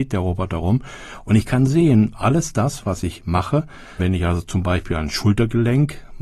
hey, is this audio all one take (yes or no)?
yes